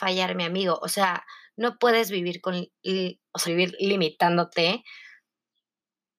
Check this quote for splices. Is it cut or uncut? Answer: cut